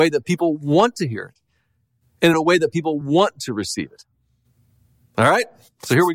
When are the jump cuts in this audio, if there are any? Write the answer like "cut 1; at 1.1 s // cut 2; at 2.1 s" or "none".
none